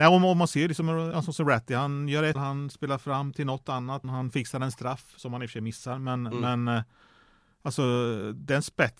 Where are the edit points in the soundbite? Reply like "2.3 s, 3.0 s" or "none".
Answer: 1.1 s, 2.3 s, 4.0 s